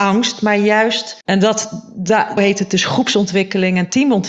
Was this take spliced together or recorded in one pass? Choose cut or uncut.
cut